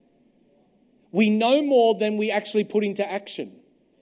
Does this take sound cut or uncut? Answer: uncut